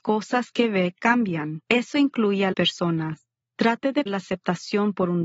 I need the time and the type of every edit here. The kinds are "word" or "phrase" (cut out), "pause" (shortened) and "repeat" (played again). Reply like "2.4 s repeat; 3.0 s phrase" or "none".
1.6 s pause; 2.5 s word; 3.4 s pause; 4.1 s word